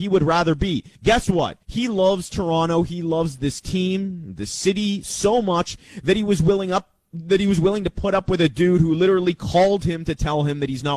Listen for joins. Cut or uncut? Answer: cut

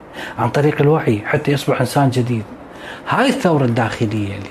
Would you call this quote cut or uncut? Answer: uncut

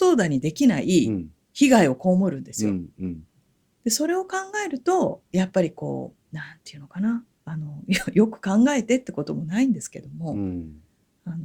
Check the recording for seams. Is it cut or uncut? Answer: cut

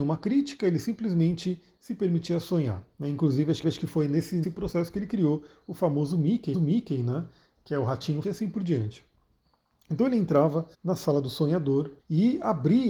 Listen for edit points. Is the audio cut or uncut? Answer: cut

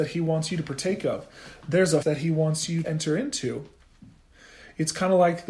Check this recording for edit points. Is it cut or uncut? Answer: cut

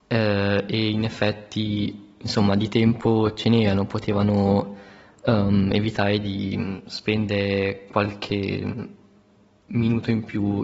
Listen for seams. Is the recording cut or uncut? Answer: uncut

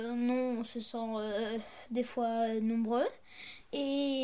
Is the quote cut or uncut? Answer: uncut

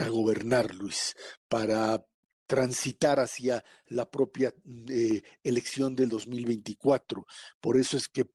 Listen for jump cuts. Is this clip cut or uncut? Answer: uncut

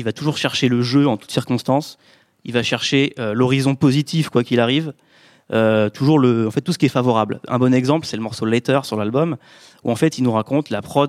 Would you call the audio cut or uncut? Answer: uncut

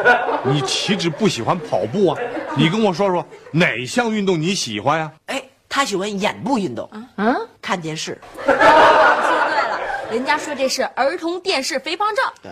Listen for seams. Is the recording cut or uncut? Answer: cut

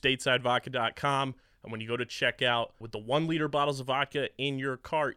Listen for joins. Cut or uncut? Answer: cut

